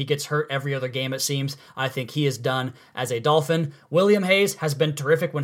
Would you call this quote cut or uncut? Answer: uncut